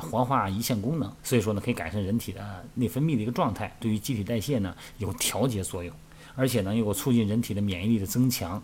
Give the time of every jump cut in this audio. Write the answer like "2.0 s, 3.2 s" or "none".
1.2 s